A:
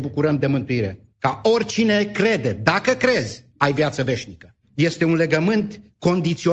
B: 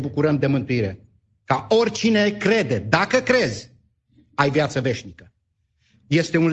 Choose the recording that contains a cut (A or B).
A